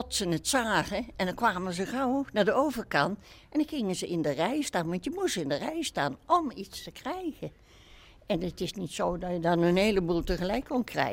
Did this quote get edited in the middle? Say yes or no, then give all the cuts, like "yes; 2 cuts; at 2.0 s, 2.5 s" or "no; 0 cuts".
no; 0 cuts